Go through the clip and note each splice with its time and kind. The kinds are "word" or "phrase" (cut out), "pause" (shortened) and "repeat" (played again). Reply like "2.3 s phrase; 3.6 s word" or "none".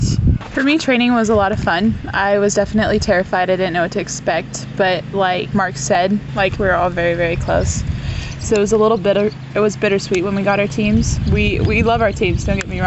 6.5 s phrase